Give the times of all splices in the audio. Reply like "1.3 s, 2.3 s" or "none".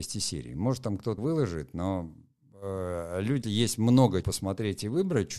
1.2 s, 3.4 s, 4.2 s

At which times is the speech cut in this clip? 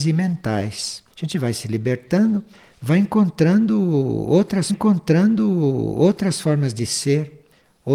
1.1 s, 4.7 s

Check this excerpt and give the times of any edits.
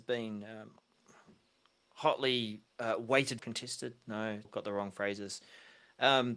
3.4 s, 4.4 s

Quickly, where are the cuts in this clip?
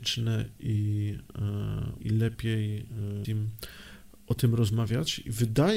2.0 s, 3.2 s

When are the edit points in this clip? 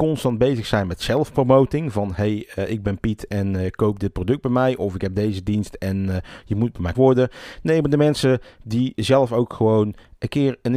6.9 s

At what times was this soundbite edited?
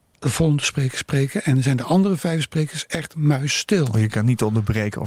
none

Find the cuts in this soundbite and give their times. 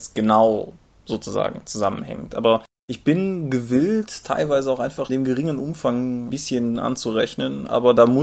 4.2 s, 5.1 s, 6.3 s

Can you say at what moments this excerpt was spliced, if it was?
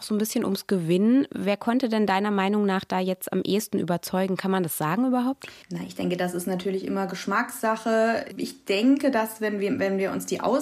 5.6 s

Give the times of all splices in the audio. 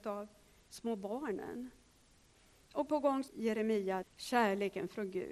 2.9 s, 3.3 s, 4.0 s

